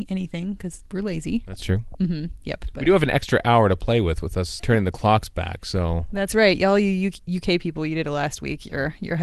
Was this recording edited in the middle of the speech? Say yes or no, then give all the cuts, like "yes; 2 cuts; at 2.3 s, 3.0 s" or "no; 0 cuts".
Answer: yes; 1 cut; at 4.6 s